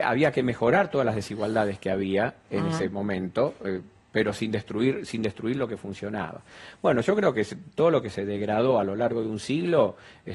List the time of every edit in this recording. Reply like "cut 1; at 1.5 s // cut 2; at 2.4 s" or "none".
none